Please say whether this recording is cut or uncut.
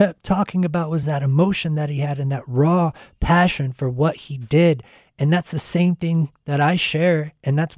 uncut